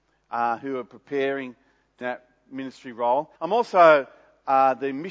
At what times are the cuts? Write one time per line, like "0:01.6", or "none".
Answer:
0:02.0
0:03.4

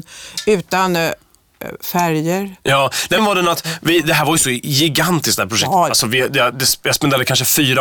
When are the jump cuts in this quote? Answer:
0:03.2

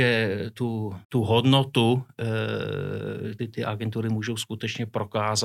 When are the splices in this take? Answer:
0:01.0
0:03.4

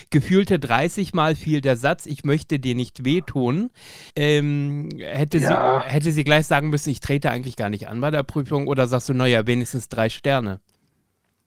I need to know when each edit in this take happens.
0:04.1

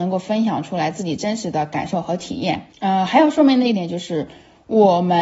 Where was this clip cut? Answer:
0:02.7

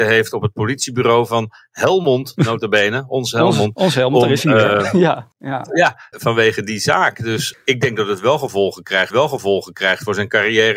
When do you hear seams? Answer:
0:05.3
0:06.1
0:07.5
0:09.1

